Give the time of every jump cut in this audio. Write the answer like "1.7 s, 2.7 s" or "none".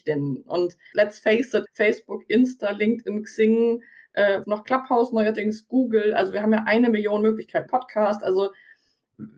0.9 s, 1.7 s, 4.4 s, 7.7 s